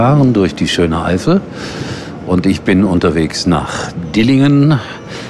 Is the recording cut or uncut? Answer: uncut